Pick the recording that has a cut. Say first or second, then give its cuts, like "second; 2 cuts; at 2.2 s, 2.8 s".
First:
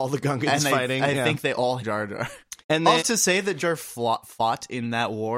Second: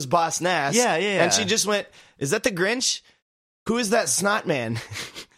first; 4 cuts; at 1.8 s, 2.6 s, 3.0 s, 3.6 s